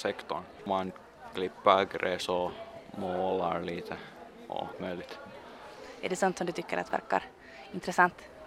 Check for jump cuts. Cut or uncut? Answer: cut